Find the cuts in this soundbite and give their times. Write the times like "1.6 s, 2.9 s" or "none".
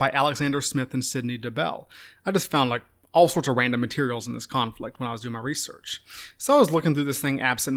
none